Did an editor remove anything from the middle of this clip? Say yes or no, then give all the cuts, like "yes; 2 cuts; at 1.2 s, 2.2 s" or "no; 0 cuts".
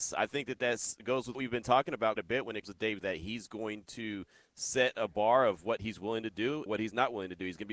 yes; 6 cuts; at 1.0 s, 1.3 s, 2.2 s, 2.6 s, 3.0 s, 6.7 s